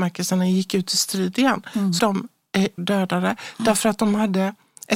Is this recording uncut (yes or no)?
no